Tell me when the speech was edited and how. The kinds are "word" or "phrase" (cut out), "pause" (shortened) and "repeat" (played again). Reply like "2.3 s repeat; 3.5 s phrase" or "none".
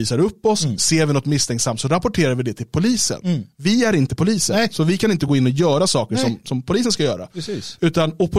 none